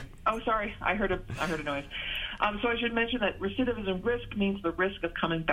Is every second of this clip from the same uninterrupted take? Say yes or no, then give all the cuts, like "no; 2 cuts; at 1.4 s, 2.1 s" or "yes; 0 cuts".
yes; 0 cuts